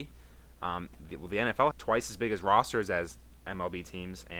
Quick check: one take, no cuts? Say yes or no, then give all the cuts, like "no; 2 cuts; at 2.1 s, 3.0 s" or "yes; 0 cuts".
no; 1 cut; at 1.7 s